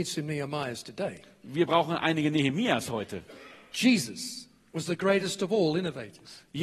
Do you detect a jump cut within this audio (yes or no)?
no